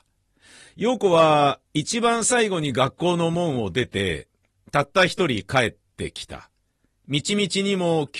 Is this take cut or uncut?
uncut